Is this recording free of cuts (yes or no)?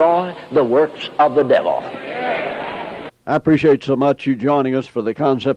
yes